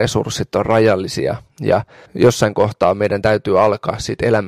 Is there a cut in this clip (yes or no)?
yes